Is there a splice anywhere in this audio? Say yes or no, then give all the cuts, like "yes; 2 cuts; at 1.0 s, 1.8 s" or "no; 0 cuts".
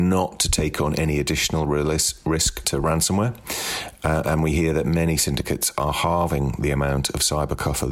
yes; 1 cut; at 2.6 s